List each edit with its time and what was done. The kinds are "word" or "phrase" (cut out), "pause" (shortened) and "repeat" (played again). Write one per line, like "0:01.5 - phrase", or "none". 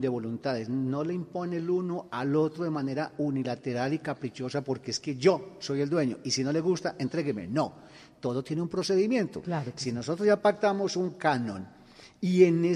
none